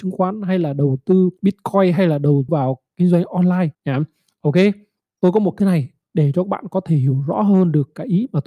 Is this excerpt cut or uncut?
cut